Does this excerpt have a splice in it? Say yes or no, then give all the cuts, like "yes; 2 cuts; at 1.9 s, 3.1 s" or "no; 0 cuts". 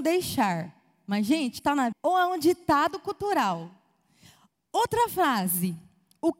yes; 2 cuts; at 1.6 s, 1.9 s